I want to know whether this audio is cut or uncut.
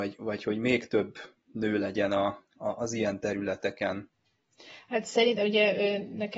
uncut